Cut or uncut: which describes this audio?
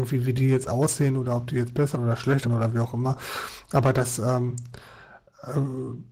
cut